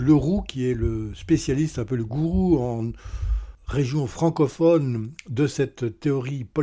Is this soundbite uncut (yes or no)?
yes